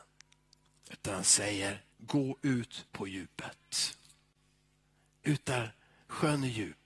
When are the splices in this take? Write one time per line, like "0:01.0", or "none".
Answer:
0:01.9
0:02.9